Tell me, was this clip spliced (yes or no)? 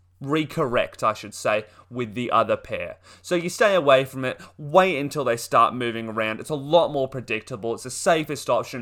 no